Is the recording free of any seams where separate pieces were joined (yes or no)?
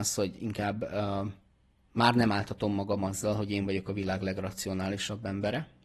yes